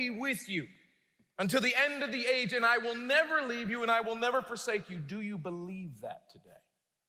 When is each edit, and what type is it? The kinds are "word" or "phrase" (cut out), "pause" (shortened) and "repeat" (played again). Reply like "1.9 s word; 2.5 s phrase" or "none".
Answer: none